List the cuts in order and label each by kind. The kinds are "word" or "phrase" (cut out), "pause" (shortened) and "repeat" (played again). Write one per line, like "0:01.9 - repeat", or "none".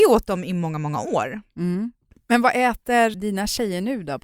0:03.1 - word